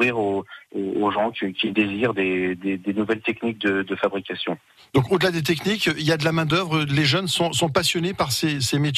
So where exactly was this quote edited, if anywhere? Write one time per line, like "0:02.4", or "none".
none